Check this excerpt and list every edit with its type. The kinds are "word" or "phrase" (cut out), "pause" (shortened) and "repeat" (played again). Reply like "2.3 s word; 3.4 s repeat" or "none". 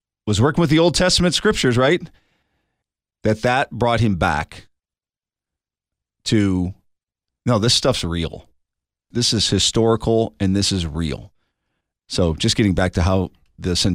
none